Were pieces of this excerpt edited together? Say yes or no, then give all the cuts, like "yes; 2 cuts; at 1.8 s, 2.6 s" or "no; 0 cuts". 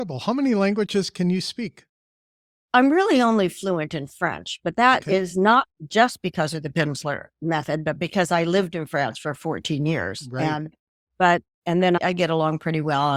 no; 0 cuts